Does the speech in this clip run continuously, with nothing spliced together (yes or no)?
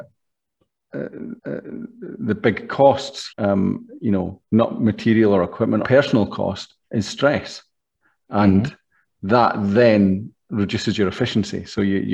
no